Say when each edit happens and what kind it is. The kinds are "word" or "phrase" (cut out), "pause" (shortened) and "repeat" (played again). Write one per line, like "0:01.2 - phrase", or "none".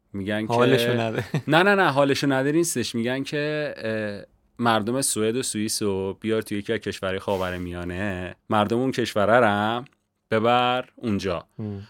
0:08.4 - pause